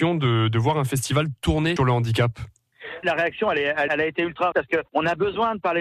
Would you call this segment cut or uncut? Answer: cut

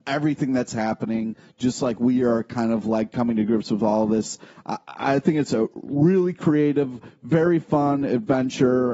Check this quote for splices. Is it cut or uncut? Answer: uncut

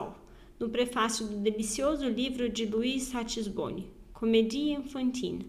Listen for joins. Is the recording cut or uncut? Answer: uncut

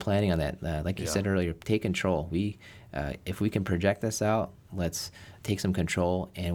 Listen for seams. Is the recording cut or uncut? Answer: cut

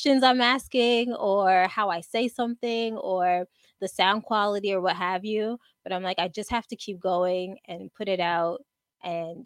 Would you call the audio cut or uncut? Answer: uncut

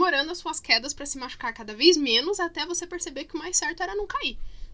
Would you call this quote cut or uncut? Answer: uncut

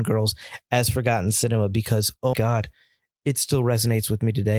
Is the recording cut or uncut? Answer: cut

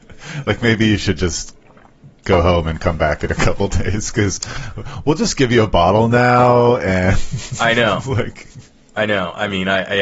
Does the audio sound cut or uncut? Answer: uncut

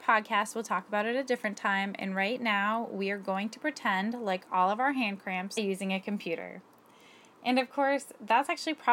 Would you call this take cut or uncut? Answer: cut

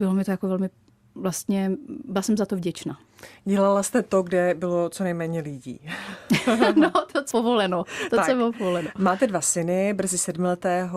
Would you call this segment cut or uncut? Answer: cut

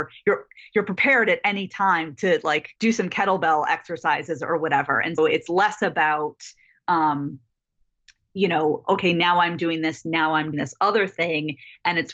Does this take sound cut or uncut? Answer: cut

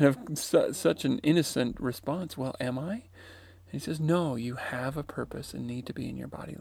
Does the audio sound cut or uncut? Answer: uncut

